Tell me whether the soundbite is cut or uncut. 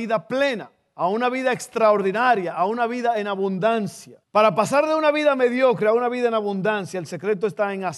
cut